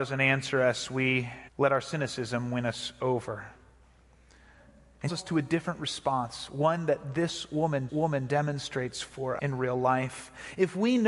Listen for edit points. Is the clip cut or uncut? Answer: cut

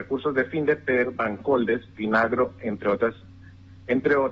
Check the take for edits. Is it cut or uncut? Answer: uncut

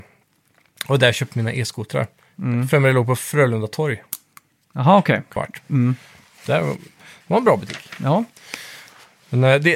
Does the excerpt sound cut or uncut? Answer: cut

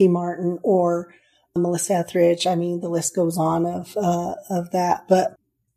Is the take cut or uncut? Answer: uncut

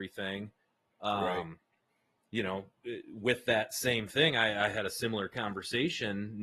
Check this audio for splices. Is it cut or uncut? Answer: uncut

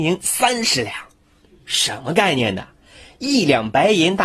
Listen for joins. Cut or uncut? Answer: uncut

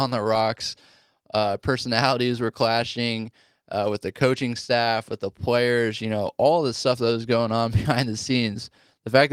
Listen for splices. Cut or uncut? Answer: uncut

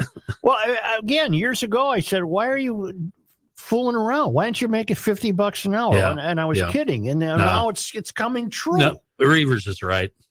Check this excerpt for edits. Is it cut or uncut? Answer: uncut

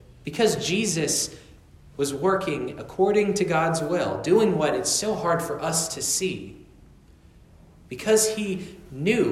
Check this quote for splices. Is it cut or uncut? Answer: uncut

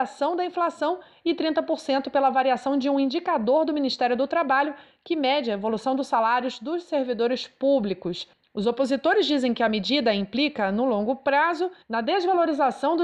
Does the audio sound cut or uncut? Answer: uncut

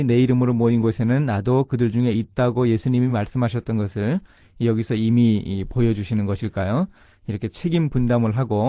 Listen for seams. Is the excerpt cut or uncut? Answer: uncut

